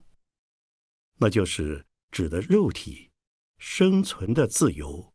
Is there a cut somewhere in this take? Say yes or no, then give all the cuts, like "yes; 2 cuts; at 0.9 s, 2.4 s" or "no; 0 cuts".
no; 0 cuts